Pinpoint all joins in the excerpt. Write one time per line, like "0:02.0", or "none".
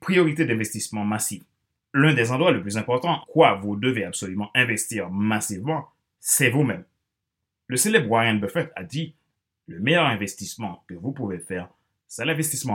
0:03.2